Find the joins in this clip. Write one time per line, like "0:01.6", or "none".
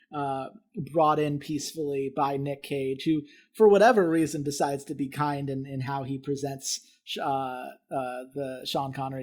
none